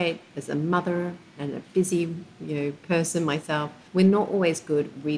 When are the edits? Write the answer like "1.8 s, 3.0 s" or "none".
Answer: 3.9 s